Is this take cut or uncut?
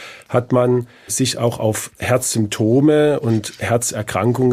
cut